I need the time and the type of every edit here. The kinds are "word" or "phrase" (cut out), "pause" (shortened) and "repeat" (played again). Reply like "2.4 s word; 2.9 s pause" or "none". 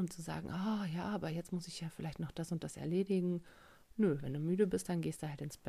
none